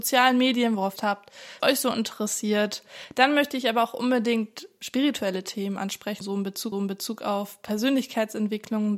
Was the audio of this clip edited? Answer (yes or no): yes